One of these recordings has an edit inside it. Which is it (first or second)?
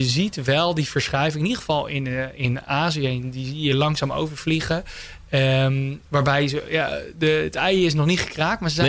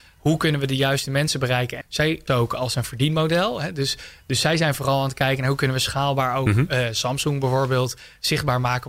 second